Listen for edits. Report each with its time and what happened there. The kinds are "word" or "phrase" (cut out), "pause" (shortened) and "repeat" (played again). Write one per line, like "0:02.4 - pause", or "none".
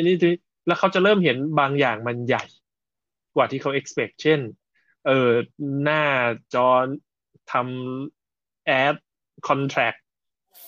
none